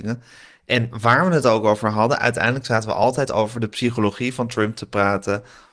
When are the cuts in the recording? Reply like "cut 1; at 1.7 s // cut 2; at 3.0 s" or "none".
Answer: none